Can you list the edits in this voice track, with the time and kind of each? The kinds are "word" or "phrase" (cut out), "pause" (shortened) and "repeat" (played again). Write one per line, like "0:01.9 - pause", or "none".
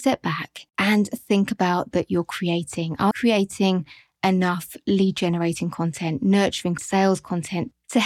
0:01.9 - phrase
0:03.1 - word
0:06.8 - word